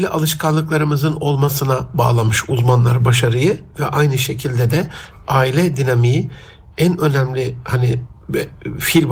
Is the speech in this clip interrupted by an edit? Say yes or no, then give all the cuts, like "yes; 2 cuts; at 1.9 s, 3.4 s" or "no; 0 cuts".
no; 0 cuts